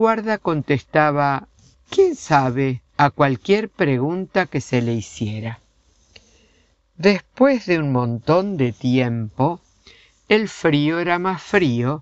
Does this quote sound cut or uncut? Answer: cut